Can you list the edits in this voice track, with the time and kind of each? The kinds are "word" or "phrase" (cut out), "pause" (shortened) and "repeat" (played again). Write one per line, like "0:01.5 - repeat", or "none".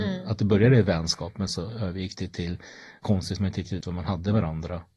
0:01.5 - word
0:03.0 - word
0:03.8 - word

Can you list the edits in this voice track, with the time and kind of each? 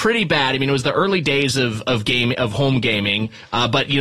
none

